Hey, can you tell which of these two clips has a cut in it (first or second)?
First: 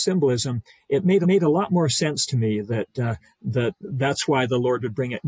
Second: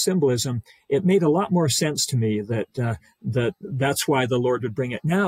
first